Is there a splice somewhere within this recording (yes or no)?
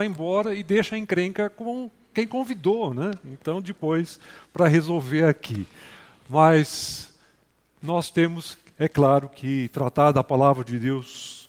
no